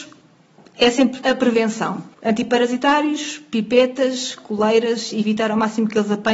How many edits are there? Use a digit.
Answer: 2